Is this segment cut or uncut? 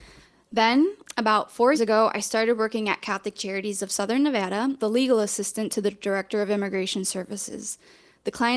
cut